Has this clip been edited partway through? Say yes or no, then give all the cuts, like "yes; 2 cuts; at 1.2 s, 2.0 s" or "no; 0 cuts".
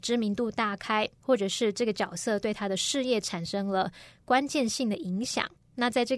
no; 0 cuts